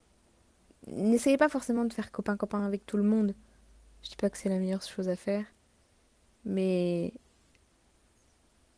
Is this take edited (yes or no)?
no